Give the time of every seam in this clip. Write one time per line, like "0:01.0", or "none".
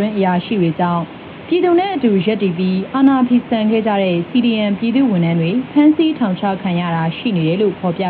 none